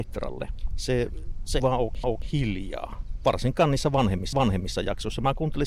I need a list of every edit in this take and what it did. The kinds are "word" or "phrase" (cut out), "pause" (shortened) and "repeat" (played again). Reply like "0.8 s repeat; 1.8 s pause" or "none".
1.6 s word; 2.0 s repeat; 4.3 s repeat

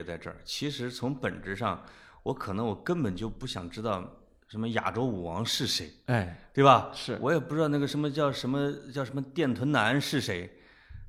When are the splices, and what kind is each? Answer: none

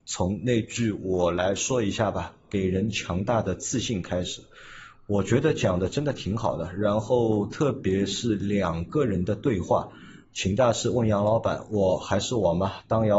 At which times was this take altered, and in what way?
10.2 s pause

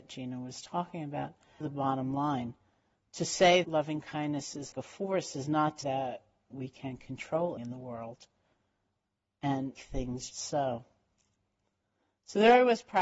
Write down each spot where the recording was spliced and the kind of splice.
1.6 s word; 3.6 s word; 4.7 s word; 5.8 s word; 6.5 s word; 7.6 s word; 9.7 s word; 10.3 s word

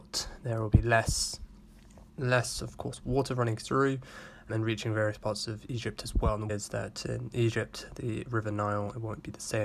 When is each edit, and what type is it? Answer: 2.1 s word; 4.5 s word; 6.5 s word

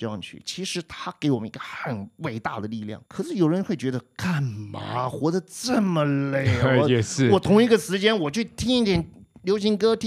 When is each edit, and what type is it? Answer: 3.1 s pause

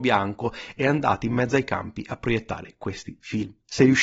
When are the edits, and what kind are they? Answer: none

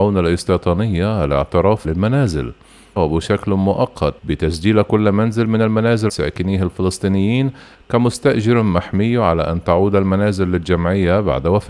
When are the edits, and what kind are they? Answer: 1.8 s word; 3.0 s phrase; 4.2 s pause; 6.1 s phrase

